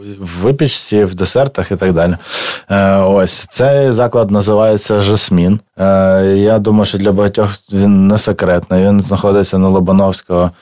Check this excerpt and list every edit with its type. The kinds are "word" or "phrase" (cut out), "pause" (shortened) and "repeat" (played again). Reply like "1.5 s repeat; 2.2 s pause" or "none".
5.7 s pause